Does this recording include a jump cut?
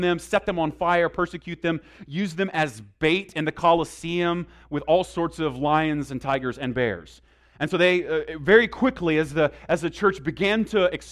no; 0 cuts

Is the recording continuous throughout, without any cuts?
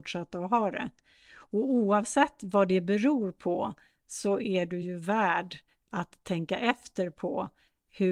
yes; 0 cuts

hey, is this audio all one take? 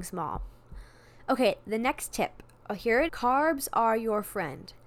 no; 1 cut; at 3.1 s

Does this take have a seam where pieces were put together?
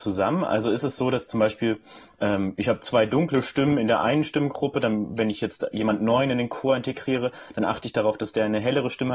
no; 0 cuts

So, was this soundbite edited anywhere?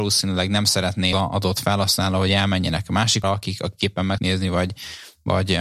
yes; 3 cuts; at 1.1 s, 3.2 s, 4.2 s

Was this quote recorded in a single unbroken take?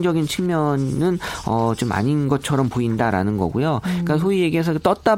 yes; 0 cuts

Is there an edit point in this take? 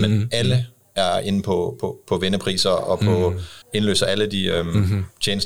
yes; 1 cut; at 3.6 s

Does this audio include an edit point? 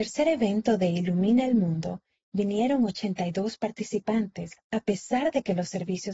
no; 0 cuts

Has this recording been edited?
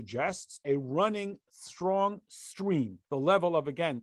yes; 1 cut; at 3.0 s

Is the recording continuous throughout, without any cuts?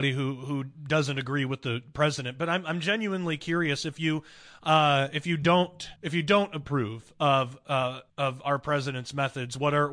no; 2 cuts; at 6.0 s, 8.1 s

